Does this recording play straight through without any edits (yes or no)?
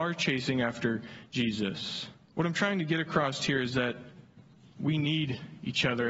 no